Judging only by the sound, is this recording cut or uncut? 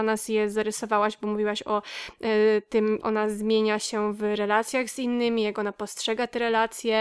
cut